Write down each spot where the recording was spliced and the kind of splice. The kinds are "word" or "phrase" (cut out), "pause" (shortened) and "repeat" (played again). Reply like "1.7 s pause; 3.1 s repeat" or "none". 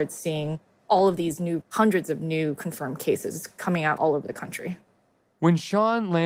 1.6 s word; 4.0 s word